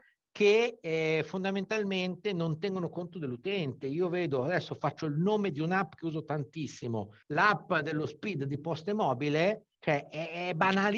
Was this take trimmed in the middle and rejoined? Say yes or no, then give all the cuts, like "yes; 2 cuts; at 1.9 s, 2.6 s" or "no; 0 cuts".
yes; 2 cuts; at 7.2 s, 9.7 s